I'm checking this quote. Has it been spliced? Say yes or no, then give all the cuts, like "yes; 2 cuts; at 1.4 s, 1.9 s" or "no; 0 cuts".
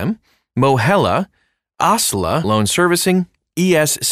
yes; 1 cut; at 2.4 s